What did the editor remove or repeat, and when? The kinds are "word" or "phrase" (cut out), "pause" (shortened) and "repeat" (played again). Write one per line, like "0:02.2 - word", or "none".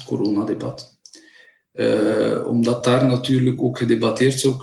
none